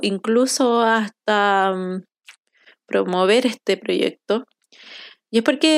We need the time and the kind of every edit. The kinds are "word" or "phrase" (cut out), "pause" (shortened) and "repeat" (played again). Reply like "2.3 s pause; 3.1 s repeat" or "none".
none